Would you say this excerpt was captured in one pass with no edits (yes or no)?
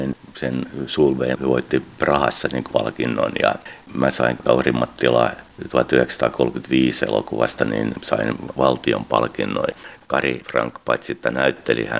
no